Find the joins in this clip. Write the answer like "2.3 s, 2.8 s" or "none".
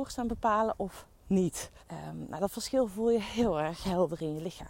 1.8 s